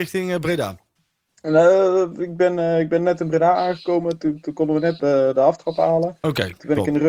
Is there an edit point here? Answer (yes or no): yes